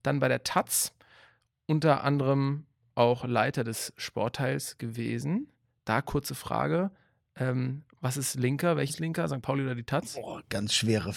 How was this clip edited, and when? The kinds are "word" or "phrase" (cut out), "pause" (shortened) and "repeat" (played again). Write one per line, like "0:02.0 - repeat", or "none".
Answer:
0:08.9 - word